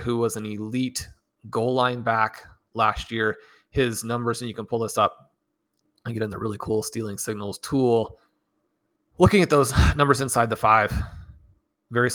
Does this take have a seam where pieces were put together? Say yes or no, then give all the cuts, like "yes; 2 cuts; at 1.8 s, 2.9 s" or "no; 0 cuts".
no; 0 cuts